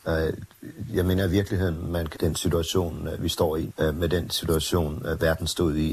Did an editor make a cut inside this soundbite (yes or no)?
yes